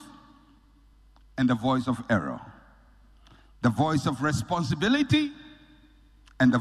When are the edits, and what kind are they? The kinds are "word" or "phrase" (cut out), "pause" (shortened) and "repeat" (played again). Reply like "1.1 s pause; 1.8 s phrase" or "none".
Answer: none

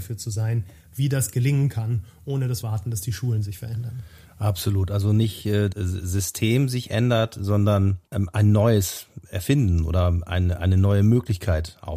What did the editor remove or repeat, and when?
2.6 s phrase; 5.7 s phrase; 8.1 s pause

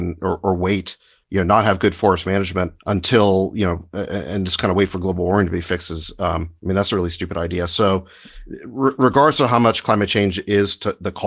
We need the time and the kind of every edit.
2.8 s pause; 6.6 s pause

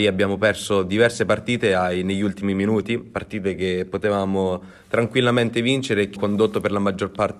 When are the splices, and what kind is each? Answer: 6.2 s word

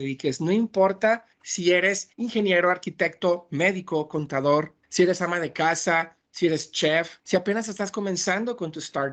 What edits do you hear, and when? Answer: 1.3 s pause; 2.1 s pause; 4.8 s pause; 7.2 s pause

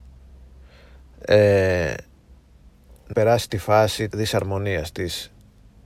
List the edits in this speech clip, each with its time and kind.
3.1 s word; 3.5 s phrase; 4.1 s word

